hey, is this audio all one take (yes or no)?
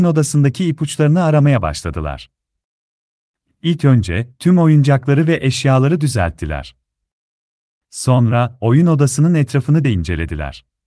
no